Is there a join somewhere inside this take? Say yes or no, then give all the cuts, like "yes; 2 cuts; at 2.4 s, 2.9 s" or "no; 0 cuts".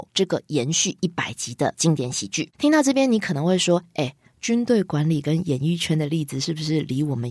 yes; 1 cut; at 2.5 s